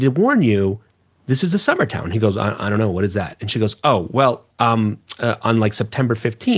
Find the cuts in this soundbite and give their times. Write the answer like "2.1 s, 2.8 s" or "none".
4.5 s